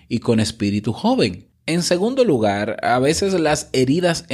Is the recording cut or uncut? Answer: cut